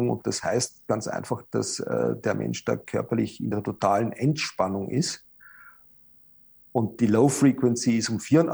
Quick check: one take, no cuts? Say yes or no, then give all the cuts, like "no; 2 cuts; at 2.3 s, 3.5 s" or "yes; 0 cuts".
yes; 0 cuts